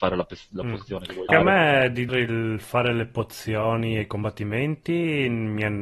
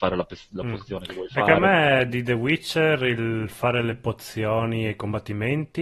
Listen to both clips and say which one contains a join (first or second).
first